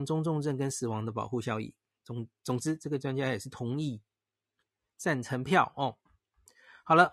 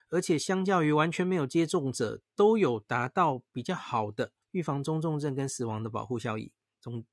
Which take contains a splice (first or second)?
second